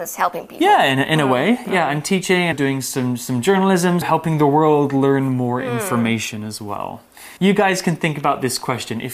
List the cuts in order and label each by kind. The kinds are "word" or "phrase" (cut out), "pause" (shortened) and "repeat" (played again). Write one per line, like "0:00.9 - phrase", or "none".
0:02.5 - word
0:04.0 - word
0:07.4 - pause